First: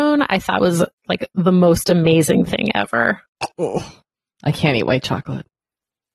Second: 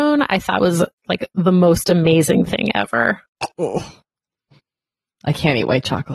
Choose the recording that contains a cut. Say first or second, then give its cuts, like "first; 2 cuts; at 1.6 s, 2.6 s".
first; 1 cut; at 4.1 s